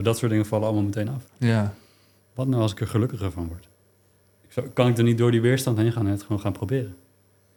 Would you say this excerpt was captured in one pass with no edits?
no; 1 cut; at 1.3 s

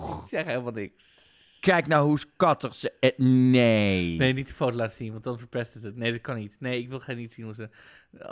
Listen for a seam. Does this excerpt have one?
no; 0 cuts

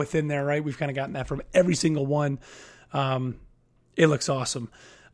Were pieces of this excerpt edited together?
no; 0 cuts

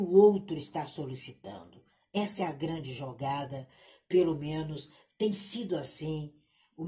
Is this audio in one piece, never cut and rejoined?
yes; 0 cuts

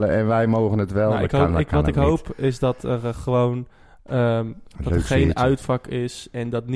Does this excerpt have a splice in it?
no; 0 cuts

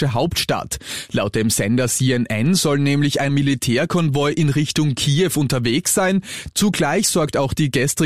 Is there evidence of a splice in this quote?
yes; 1 cut; at 3.3 s

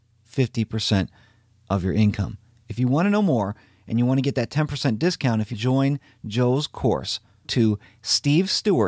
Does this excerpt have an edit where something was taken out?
yes; 2 cuts; at 5.5 s, 7.4 s

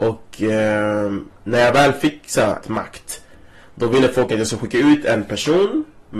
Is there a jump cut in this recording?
yes; 1 cut; at 2.6 s

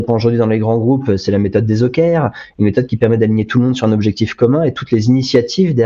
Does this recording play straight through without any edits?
yes; 0 cuts

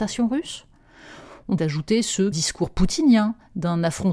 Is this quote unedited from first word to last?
no; 2 cuts; at 1.6 s, 2.3 s

